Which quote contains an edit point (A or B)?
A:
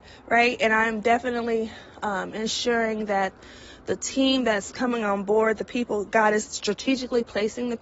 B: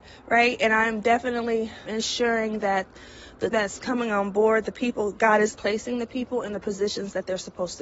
B